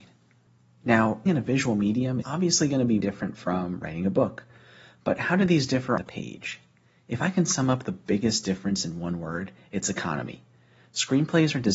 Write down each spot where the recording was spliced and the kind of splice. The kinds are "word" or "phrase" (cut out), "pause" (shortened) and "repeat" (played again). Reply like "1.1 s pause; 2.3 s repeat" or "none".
1.3 s word; 2.2 s word; 3.0 s word; 6.0 s word